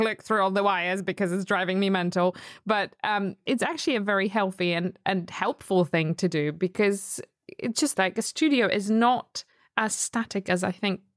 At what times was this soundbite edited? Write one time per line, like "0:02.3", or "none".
0:03.5
0:08.0